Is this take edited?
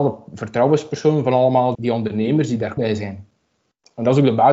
yes; 2 cuts; at 1.7 s, 2.8 s

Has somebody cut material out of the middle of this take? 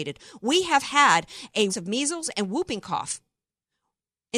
yes; 1 cut; at 1.7 s

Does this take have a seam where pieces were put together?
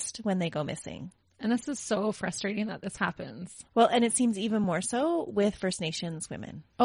no; 0 cuts

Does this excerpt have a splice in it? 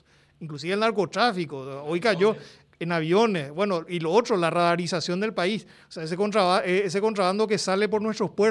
no; 0 cuts

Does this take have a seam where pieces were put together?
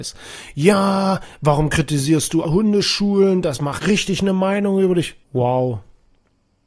yes; 3 cuts; at 2.4 s, 3.8 s, 5.2 s

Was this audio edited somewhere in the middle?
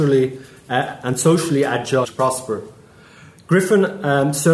yes; 1 cut; at 2.0 s

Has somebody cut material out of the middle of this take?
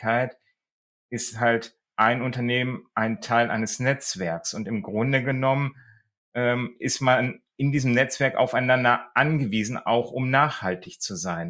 no; 0 cuts

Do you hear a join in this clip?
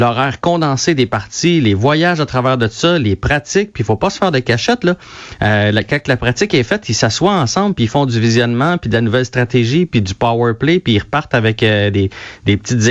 no; 0 cuts

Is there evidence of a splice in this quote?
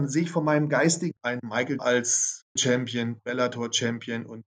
yes; 3 cuts; at 1.2 s, 1.8 s, 2.6 s

